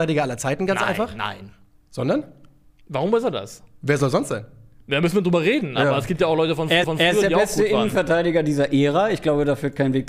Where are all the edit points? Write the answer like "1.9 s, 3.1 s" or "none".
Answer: 6.8 s